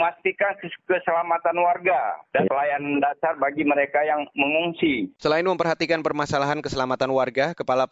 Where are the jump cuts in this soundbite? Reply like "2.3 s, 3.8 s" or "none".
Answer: none